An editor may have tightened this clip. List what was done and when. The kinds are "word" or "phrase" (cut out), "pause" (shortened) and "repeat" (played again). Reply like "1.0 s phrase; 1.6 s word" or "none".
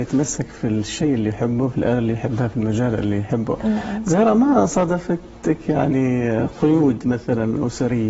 none